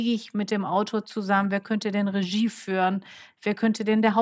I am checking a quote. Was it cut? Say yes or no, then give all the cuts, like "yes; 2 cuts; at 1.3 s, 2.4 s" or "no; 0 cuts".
no; 0 cuts